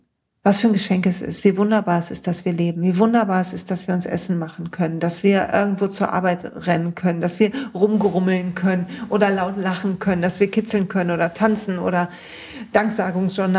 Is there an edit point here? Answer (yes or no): no